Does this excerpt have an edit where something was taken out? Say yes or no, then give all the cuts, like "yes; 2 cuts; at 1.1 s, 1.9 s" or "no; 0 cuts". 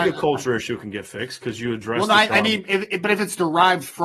no; 0 cuts